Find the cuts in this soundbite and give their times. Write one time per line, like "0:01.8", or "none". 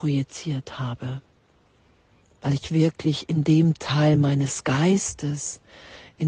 none